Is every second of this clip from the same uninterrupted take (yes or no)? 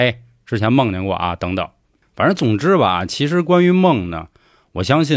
yes